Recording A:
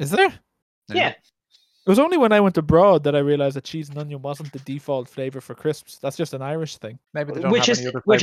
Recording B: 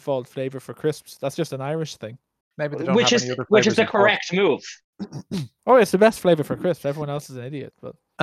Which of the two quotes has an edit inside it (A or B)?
A